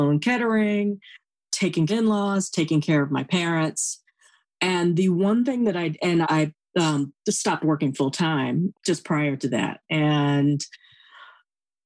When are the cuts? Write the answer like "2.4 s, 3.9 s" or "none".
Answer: 1.9 s, 6.2 s, 8.7 s